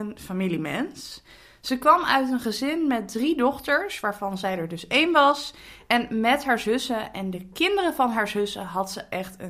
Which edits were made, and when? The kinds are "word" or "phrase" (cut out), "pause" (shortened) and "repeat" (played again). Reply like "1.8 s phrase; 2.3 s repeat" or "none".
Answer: none

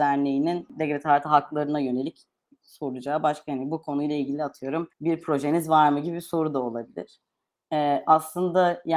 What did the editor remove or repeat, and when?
4.9 s pause

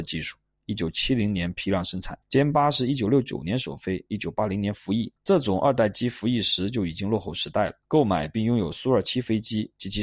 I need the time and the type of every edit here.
2.2 s pause; 5.2 s pause; 7.8 s pause

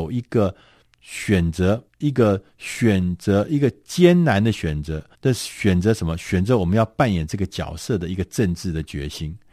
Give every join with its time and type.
1.9 s pause; 5.1 s pause

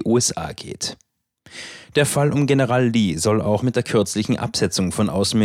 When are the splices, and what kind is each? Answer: none

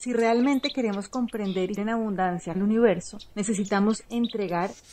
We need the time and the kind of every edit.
1.8 s word; 2.5 s word

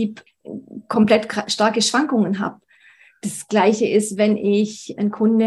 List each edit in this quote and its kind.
none

